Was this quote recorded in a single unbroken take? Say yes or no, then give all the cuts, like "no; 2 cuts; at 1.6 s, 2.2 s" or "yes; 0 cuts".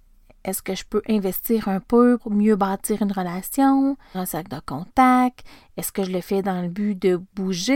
no; 2 cuts; at 2.2 s, 4.1 s